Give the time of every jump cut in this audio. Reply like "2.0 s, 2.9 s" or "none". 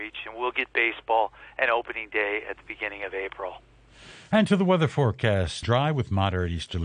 5.6 s